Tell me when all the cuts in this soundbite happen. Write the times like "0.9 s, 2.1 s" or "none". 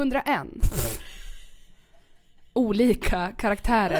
none